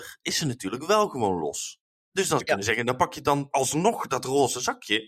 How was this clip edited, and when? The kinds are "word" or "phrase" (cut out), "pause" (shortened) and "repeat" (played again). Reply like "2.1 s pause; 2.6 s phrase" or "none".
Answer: 2.4 s word; 3.5 s word